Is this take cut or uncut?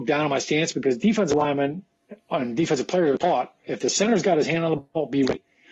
uncut